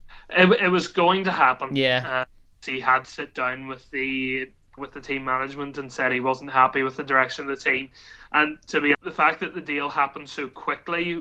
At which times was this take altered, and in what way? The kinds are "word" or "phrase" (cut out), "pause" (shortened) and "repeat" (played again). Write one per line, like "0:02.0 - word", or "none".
0:02.6 - word
0:03.0 - word
0:04.8 - word
0:08.9 - word